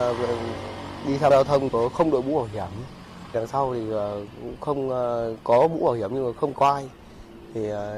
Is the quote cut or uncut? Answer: cut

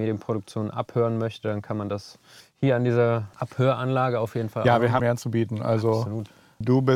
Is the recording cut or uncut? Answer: cut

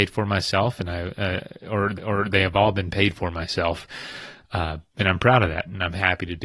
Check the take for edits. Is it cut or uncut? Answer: cut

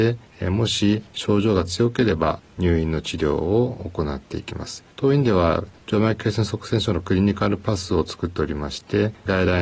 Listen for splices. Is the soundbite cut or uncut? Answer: cut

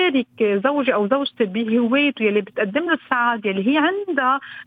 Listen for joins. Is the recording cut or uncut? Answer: uncut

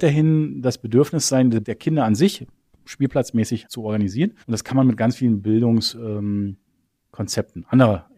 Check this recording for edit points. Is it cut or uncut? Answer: cut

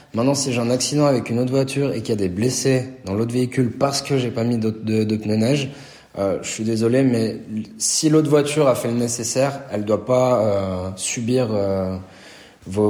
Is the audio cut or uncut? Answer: uncut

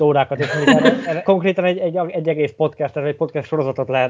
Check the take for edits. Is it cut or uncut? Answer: cut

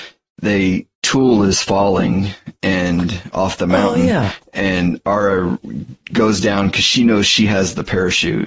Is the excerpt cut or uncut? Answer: cut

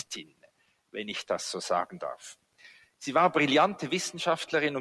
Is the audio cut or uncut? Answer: uncut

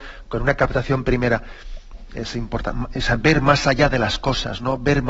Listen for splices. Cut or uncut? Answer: uncut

